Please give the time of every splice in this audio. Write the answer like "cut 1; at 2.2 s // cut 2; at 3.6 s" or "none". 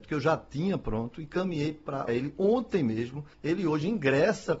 cut 1; at 2.1 s // cut 2; at 3.3 s